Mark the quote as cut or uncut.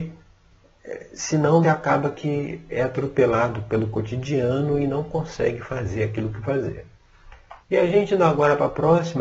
cut